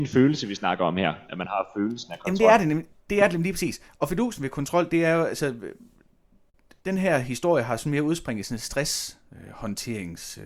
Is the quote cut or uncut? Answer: uncut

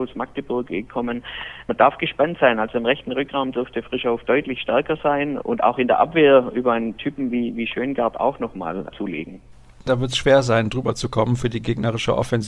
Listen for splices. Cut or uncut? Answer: uncut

